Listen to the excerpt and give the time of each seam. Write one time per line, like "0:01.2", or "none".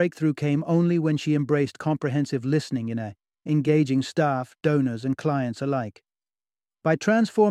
none